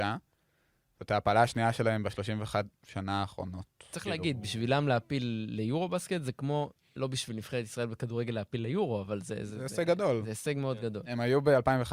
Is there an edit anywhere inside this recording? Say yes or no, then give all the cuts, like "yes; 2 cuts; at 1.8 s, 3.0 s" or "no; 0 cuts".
no; 0 cuts